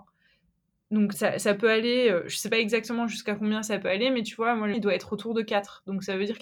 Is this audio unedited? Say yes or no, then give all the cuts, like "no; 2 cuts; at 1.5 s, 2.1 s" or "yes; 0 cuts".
no; 2 cuts; at 1.1 s, 4.7 s